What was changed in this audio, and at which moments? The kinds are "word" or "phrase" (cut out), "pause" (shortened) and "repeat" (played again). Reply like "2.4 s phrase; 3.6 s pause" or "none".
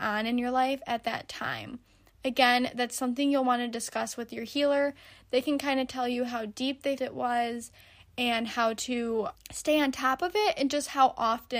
7.0 s word; 9.3 s word